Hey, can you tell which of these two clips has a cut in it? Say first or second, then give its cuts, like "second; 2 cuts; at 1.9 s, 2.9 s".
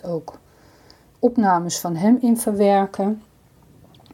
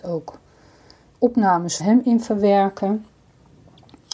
second; 1 cut; at 1.8 s